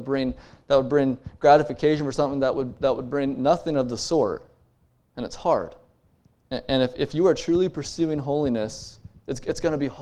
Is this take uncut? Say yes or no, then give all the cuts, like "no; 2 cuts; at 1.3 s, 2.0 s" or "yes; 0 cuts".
yes; 0 cuts